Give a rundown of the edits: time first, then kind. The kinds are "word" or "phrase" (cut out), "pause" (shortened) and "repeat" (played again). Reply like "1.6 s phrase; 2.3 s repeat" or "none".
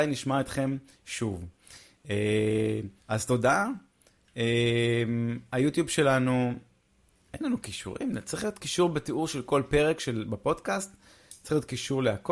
3.0 s pause